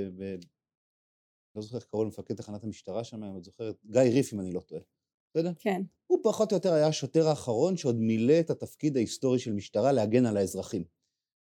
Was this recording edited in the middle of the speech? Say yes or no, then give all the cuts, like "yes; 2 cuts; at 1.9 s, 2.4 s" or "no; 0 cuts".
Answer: no; 0 cuts